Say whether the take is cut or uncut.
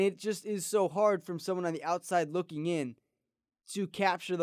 uncut